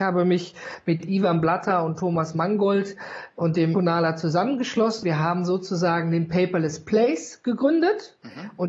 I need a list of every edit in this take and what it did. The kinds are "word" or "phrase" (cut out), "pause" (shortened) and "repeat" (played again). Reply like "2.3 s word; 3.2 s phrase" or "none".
3.7 s word; 5.0 s word